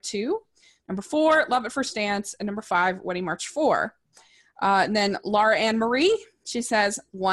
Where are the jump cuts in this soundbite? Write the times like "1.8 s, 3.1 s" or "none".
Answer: none